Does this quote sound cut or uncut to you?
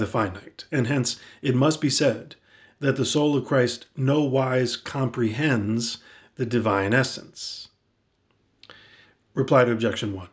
uncut